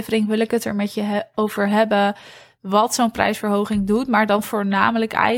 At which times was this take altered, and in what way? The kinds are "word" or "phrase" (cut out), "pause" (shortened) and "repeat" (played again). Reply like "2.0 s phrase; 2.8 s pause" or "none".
none